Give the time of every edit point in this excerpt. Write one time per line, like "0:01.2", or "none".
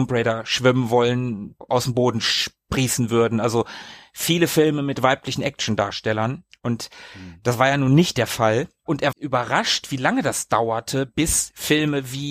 0:09.1